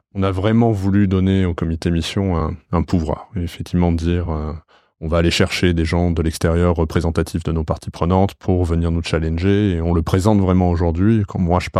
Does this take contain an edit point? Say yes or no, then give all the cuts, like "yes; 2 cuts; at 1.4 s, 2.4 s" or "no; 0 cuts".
no; 0 cuts